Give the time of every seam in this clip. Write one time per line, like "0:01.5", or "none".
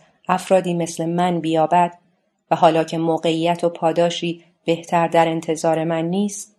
none